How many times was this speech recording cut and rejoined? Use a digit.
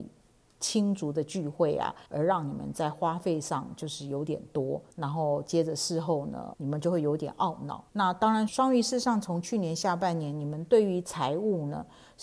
5